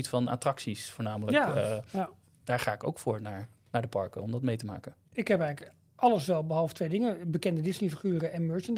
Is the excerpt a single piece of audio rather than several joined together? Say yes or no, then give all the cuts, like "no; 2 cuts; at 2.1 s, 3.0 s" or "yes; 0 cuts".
no; 2 cuts; at 2.3 s, 5.0 s